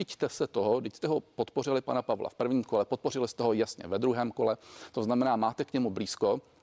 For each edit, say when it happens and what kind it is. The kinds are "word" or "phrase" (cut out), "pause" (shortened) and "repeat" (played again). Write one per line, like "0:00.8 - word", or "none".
none